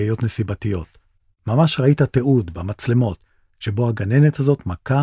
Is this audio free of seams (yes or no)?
yes